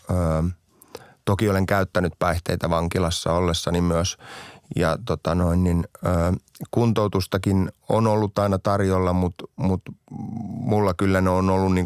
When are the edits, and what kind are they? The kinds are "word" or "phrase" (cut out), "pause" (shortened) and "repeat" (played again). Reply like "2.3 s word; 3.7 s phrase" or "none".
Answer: none